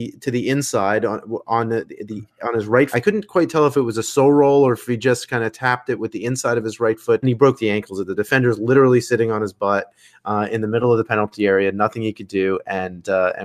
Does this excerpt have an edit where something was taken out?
yes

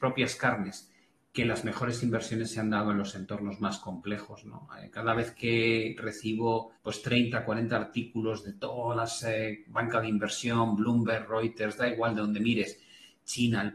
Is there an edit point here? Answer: yes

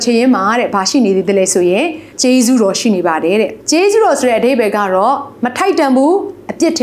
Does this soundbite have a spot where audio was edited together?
yes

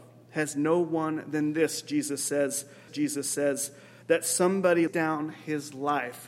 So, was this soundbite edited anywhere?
yes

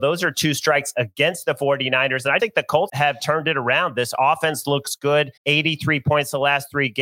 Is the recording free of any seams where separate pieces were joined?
no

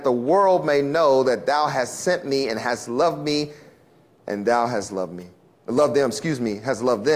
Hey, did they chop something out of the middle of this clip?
no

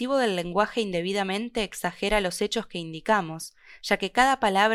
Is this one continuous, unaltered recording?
yes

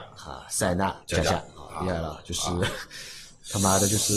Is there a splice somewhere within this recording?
yes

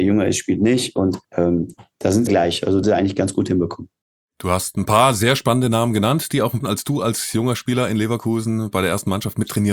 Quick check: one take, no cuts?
no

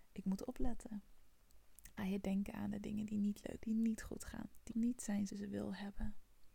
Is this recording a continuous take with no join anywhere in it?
no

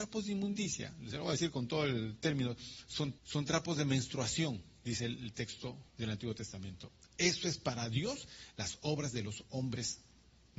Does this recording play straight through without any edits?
no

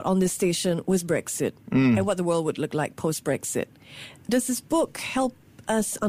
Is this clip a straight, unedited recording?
yes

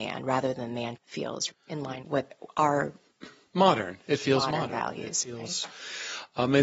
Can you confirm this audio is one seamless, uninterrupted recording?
no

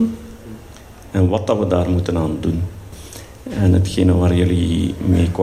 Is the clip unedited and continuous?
yes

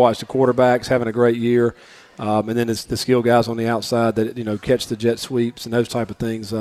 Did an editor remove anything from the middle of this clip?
no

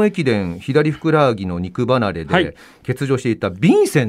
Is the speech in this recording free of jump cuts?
yes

